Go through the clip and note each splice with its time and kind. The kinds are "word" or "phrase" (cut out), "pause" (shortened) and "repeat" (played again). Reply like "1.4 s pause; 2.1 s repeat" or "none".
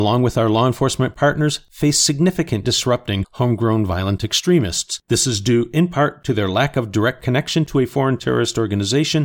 2.6 s phrase; 5.0 s pause